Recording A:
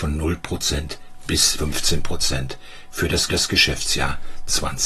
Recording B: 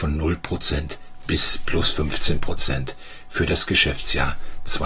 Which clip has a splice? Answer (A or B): A